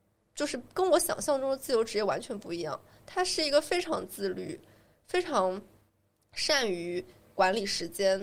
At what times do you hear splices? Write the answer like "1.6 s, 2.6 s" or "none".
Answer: none